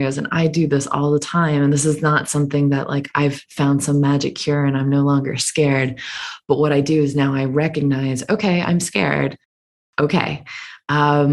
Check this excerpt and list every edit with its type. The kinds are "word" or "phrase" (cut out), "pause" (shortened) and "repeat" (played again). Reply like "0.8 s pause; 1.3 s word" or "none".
none